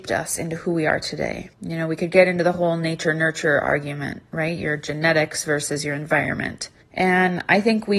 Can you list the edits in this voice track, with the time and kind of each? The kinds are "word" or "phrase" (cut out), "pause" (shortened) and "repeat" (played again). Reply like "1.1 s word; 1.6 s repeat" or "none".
1.5 s pause; 6.8 s pause